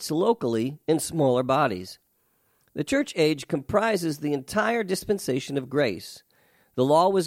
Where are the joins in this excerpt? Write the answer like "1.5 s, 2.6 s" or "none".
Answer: none